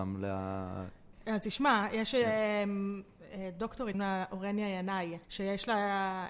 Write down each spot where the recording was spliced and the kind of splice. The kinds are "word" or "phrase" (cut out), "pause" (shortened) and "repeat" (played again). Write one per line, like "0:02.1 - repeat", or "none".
0:01.1 - pause
0:03.9 - word
0:05.2 - pause